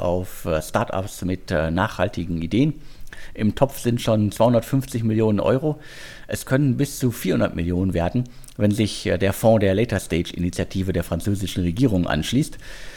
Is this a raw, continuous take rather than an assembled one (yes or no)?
yes